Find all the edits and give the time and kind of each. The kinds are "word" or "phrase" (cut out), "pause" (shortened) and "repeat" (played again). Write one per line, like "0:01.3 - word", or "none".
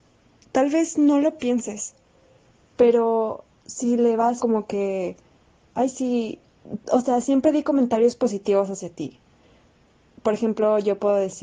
0:04.4 - word